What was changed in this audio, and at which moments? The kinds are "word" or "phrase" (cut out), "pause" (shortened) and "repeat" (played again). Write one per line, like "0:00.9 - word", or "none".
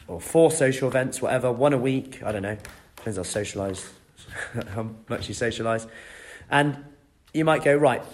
none

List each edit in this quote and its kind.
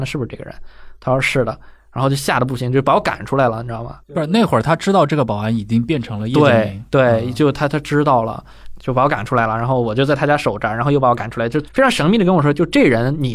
0:04.0 - pause

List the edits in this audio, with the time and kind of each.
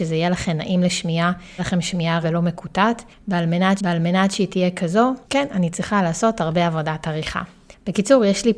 0:01.6 - word
0:02.2 - word
0:03.8 - repeat
0:05.2 - pause

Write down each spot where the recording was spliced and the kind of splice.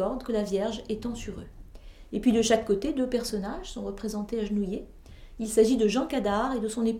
none

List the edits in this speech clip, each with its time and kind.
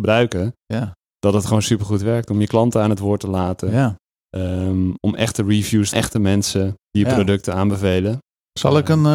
0:05.9 - phrase
0:06.8 - pause

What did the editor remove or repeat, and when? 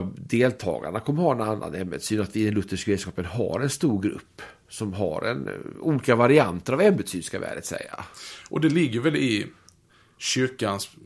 none

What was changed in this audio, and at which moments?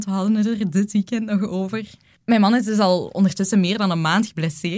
none

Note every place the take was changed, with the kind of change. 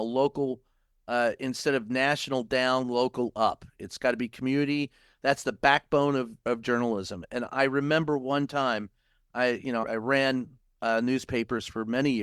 0:09.8 - word

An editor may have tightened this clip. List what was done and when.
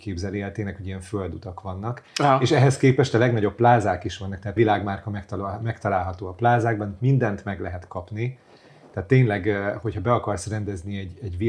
0:04.6 - word

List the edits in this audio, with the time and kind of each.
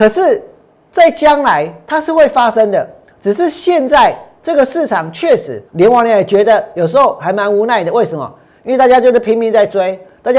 0:05.7 - pause

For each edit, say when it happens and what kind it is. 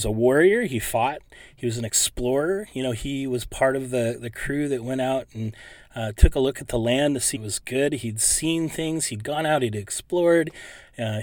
0:07.3 - word

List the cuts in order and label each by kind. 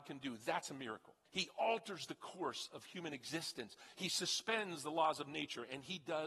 0:01.3 - pause
0:03.9 - word

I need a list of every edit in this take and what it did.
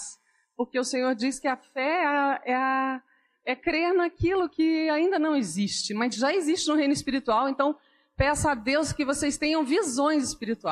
none

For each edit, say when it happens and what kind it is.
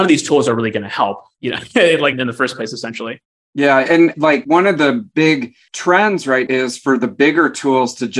0:06.5 - word

